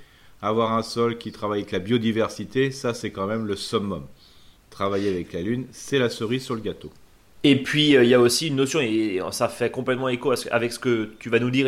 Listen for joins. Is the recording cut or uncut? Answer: uncut